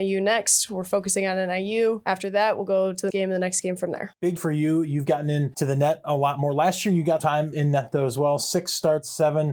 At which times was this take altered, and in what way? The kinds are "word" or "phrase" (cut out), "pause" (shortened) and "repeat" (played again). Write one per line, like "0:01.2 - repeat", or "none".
0:03.1 - word
0:04.4 - word
0:07.2 - word
0:07.5 - word